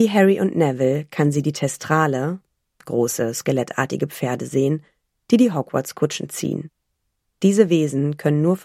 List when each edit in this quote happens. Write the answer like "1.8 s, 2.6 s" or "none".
none